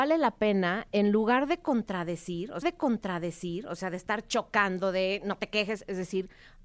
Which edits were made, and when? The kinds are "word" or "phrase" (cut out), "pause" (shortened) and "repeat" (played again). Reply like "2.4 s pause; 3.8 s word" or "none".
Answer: 2.6 s repeat